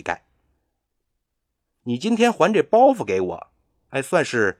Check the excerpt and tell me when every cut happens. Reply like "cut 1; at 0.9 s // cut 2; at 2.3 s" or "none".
none